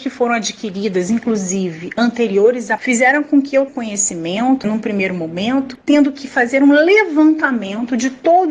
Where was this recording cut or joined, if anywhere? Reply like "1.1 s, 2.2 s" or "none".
2.8 s, 3.7 s, 5.8 s